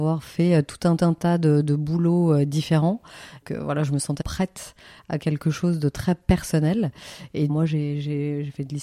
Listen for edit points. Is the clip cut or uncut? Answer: cut